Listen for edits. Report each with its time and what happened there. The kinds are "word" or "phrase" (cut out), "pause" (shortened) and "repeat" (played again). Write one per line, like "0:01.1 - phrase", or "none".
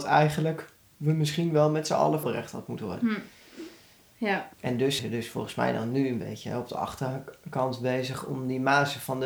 0:02.2 - phrase
0:04.5 - pause
0:05.0 - word